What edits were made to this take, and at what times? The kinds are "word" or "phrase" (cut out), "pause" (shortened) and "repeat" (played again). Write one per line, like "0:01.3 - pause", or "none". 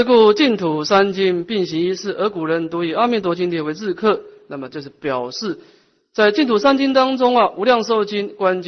none

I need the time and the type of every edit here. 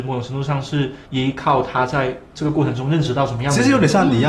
0:01.1 - pause

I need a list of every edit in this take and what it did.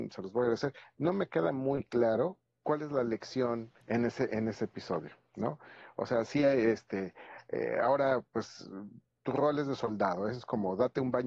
0:02.5 - pause
0:03.8 - pause

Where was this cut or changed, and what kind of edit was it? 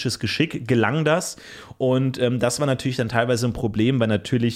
none

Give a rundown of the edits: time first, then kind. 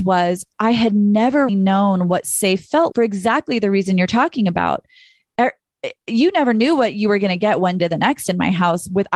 0:01.5 - word
0:02.9 - word
0:07.8 - word

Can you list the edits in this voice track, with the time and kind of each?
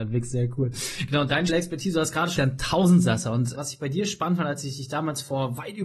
0:01.5 - word
0:02.4 - phrase
0:03.5 - word

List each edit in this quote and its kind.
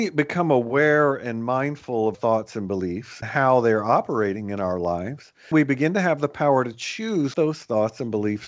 0:02.1 - word
0:03.2 - word
0:05.5 - word
0:07.3 - word

